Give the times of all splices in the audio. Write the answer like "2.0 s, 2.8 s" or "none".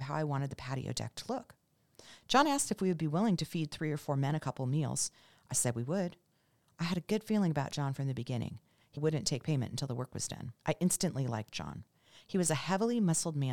9.0 s, 10.6 s